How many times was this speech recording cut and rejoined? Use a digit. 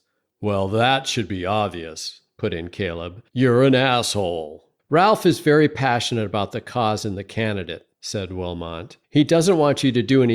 4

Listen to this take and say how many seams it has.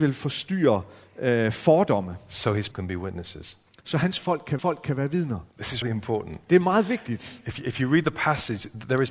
4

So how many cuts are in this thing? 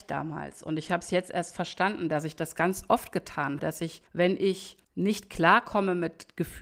3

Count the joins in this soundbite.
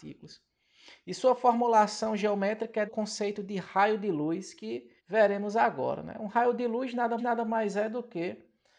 3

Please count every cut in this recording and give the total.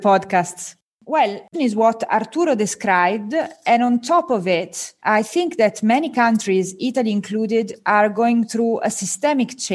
1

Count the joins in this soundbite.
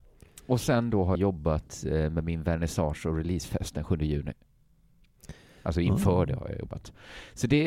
1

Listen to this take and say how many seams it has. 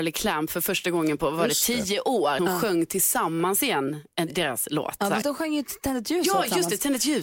2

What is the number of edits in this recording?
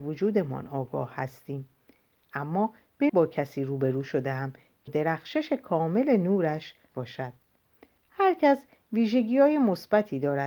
3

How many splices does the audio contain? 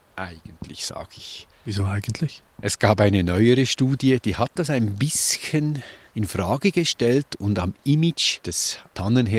0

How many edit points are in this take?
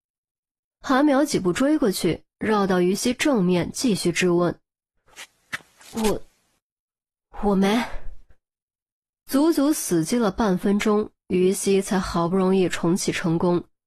0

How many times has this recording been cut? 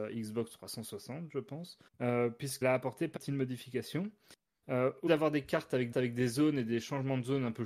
5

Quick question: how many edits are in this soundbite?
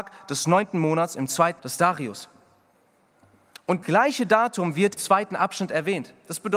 3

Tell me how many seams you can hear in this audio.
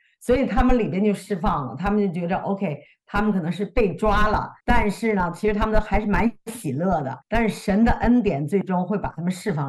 2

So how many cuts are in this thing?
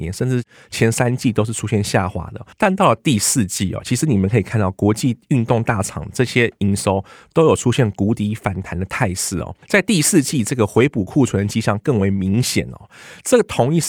2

